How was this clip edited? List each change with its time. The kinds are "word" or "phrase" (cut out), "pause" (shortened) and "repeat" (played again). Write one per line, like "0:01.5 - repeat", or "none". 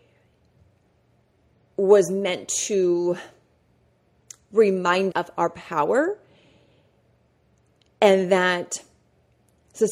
0:05.1 - word